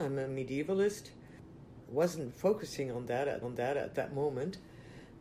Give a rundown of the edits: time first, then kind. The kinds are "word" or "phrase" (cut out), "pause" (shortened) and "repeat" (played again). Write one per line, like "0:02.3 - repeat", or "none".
0:02.3 - word
0:03.4 - repeat